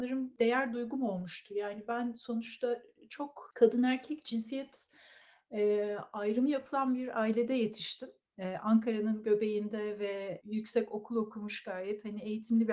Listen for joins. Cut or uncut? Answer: uncut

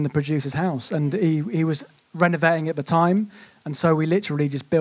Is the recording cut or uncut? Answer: uncut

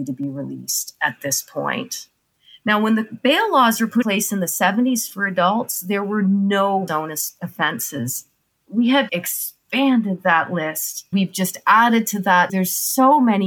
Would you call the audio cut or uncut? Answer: cut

